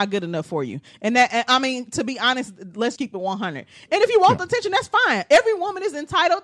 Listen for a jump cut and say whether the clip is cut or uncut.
cut